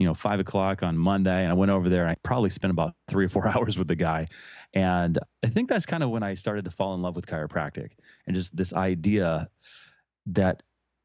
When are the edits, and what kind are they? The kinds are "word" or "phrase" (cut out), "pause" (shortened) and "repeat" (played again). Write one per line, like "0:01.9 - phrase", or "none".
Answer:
none